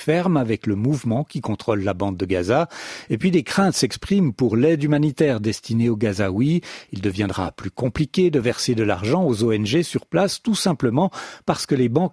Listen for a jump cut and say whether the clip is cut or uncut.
uncut